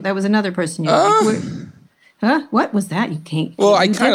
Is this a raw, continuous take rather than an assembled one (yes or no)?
yes